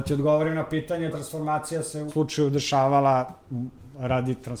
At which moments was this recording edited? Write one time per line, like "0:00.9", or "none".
0:01.1
0:02.1